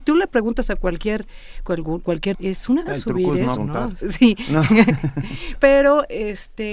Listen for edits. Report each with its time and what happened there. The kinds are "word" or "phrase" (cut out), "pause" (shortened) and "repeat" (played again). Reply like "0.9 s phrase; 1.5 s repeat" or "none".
1.6 s word; 2.0 s word; 2.3 s word; 2.9 s word; 3.6 s word; 4.0 s word; 5.5 s word